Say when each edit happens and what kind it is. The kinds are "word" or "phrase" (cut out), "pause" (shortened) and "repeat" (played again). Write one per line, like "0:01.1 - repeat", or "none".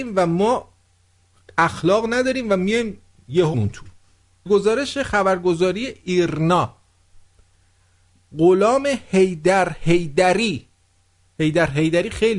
0:03.5 - word
0:04.5 - word

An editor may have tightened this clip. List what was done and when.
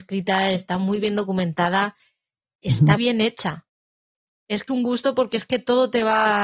0:03.0 - word
0:04.7 - word

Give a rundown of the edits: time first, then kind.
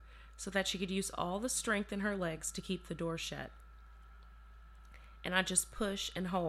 none

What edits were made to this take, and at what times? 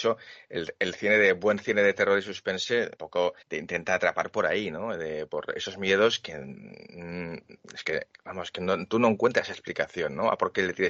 0:03.0 - word
0:03.4 - pause
0:05.3 - word
0:07.8 - word

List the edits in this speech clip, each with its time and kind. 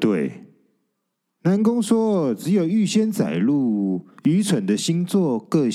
0:04.2 - pause

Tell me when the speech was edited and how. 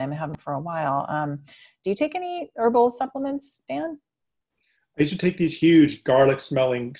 none

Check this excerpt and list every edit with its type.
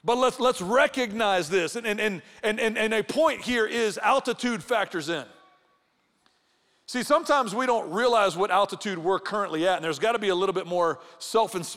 none

